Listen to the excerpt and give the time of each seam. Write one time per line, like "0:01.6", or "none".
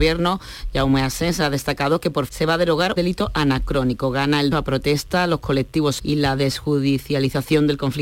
0:02.3
0:03.0
0:04.5
0:06.0